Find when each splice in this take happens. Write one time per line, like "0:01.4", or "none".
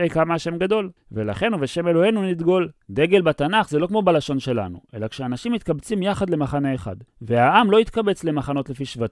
0:01.0
0:02.8
0:07.1

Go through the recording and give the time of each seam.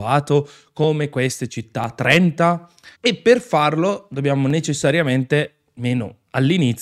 0:02.9

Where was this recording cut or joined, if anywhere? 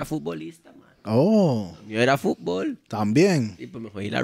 none

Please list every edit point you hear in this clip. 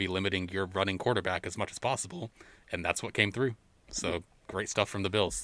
none

